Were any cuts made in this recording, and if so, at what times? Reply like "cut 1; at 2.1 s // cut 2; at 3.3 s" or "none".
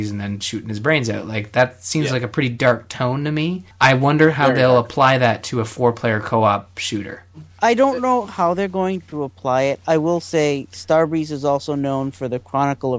cut 1; at 3.7 s // cut 2; at 7.5 s